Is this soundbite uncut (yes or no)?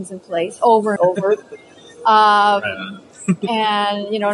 no